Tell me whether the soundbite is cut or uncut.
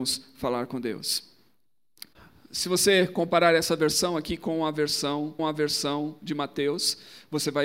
cut